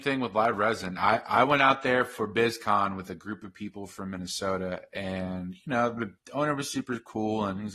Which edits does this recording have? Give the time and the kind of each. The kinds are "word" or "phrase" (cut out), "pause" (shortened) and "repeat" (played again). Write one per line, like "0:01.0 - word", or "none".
none